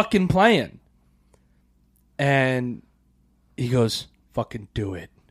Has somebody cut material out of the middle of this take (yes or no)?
no